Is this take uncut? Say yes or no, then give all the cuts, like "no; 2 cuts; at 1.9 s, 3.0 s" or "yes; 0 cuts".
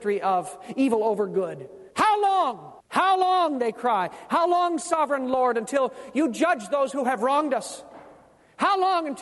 no; 2 cuts; at 1.9 s, 2.8 s